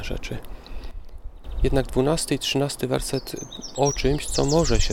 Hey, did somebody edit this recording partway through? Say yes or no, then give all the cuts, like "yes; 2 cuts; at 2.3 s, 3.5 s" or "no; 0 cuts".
yes; 1 cut; at 3.7 s